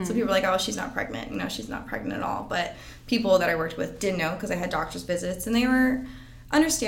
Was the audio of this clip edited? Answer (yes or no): no